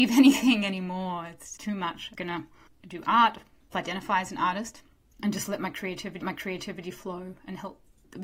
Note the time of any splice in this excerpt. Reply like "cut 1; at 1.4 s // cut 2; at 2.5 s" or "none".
cut 1; at 1.6 s // cut 2; at 2.1 s // cut 3; at 3.7 s // cut 4; at 6.2 s